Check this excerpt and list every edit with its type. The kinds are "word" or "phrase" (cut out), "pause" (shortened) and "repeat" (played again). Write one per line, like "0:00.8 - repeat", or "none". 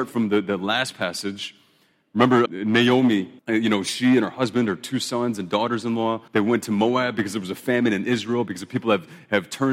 0:02.5 - word
0:03.4 - pause
0:06.3 - pause